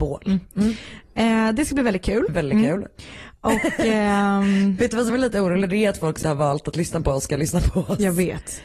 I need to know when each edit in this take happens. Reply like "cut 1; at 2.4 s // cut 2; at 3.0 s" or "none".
cut 1; at 2.3 s // cut 2; at 5.1 s // cut 3; at 6.2 s